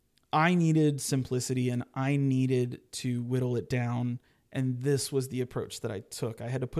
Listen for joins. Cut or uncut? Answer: uncut